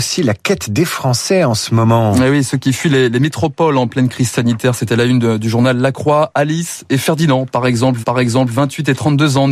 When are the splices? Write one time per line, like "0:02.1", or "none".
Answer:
0:08.0